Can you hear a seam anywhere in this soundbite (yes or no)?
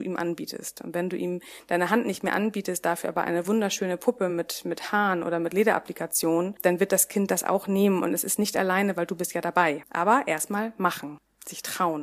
no